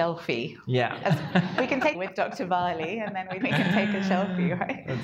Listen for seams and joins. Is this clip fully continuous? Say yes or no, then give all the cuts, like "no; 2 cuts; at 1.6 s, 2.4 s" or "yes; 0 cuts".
no; 2 cuts; at 1.9 s, 3.4 s